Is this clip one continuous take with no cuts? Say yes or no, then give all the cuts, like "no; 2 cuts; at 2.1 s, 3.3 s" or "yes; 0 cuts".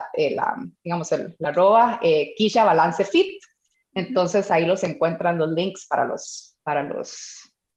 yes; 0 cuts